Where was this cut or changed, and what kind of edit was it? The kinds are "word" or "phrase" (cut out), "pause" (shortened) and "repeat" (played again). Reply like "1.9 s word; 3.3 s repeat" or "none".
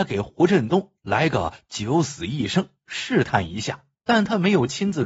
3.9 s pause